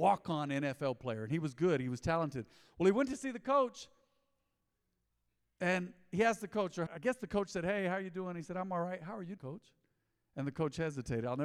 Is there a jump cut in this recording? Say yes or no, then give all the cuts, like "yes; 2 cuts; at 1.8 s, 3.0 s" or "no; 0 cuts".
yes; 2 cuts; at 6.9 s, 9.4 s